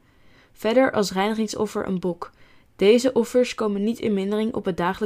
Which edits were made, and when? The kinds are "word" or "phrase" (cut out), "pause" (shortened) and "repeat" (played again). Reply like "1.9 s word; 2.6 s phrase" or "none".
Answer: none